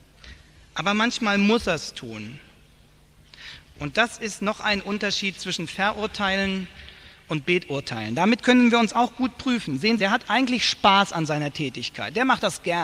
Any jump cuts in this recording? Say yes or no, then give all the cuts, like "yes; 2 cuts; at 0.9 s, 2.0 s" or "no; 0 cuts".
yes; 1 cut; at 10.0 s